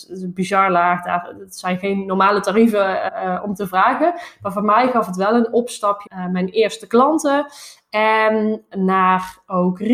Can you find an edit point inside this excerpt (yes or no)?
yes